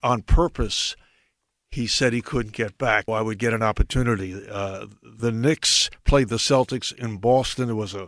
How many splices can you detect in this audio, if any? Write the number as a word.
one